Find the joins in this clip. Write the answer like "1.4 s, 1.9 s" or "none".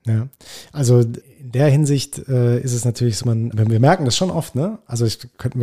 1.2 s, 3.2 s, 3.5 s